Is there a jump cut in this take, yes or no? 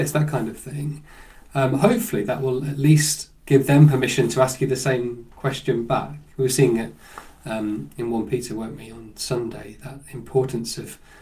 no